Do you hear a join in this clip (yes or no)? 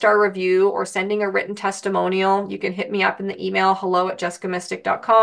no